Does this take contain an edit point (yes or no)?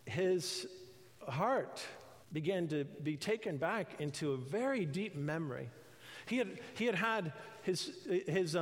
yes